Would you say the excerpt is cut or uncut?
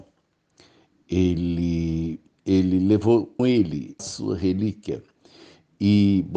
cut